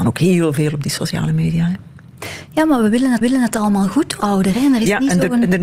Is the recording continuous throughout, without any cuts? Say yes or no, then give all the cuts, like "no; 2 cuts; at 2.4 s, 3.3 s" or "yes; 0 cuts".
no; 2 cuts; at 3.2 s, 4.2 s